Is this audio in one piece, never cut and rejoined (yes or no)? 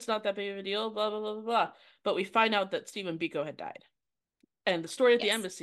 yes